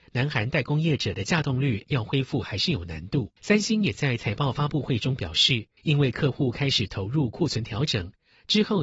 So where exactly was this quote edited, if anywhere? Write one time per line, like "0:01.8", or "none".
0:03.4
0:05.8